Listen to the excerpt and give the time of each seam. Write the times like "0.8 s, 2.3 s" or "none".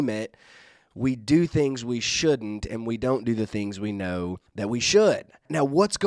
4.5 s